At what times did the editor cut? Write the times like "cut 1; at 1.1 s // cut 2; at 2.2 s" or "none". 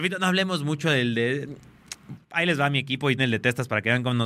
cut 1; at 3.2 s